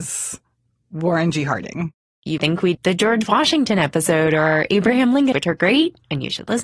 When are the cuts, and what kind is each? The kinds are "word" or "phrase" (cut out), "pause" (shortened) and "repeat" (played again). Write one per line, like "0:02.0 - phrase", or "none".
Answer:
0:02.4 - word
0:02.7 - word
0:05.3 - word